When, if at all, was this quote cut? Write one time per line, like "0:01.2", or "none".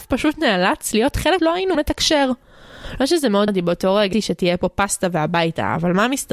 0:01.4
0:01.7
0:03.5
0:04.1